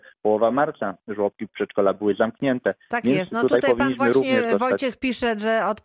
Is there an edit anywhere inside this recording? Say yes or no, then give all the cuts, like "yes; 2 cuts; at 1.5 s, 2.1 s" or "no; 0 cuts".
no; 0 cuts